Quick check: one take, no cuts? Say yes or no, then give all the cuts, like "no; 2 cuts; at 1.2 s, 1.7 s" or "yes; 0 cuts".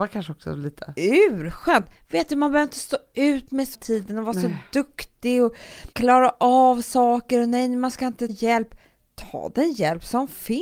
no; 3 cuts; at 3.7 s, 5.9 s, 8.3 s